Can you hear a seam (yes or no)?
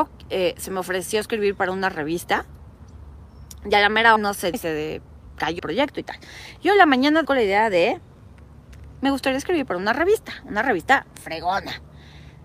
yes